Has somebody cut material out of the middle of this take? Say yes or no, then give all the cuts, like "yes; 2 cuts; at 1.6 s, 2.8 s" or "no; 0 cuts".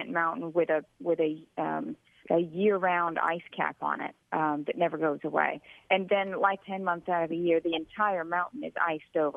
yes; 3 cuts; at 2.2 s, 4.2 s, 6.6 s